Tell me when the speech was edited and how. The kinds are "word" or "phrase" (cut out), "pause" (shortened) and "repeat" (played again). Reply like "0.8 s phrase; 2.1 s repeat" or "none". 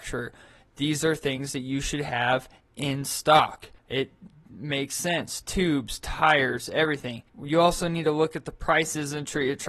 3.8 s pause; 7.3 s pause